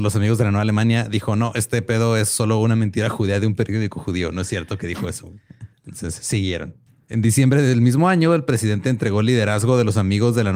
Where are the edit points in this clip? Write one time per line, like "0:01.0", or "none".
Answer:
0:05.7
0:06.9